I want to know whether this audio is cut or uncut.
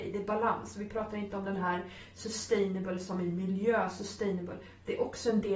uncut